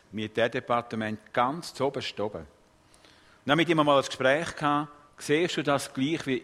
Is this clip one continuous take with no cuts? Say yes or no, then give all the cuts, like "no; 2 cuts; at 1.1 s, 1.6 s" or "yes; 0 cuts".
yes; 0 cuts